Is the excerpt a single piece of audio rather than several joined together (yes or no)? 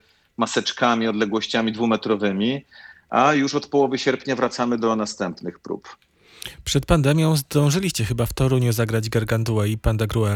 yes